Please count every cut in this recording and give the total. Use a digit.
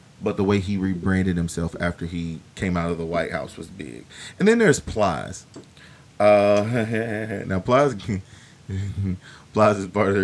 1